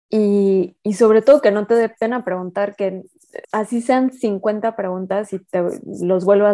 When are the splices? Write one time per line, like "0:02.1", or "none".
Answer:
0:03.4

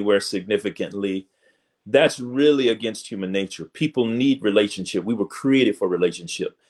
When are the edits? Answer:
none

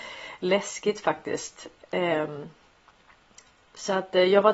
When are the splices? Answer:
none

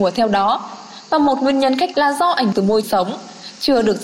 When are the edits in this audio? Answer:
0:01.9
0:02.5
0:02.8

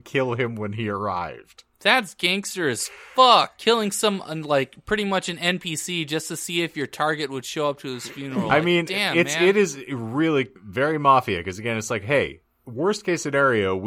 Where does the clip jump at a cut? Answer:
0:01.7
0:10.6

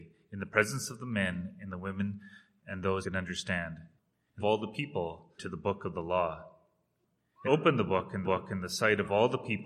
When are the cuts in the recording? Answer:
0:03.0
0:04.4
0:05.4
0:07.5
0:08.2

